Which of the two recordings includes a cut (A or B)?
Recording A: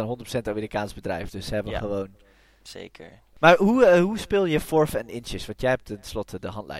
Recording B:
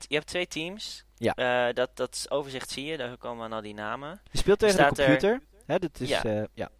B